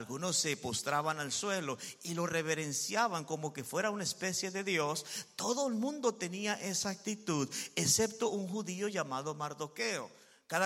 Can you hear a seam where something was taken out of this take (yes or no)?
no